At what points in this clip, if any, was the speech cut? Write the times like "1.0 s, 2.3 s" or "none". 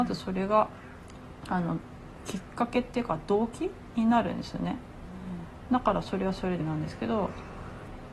6.6 s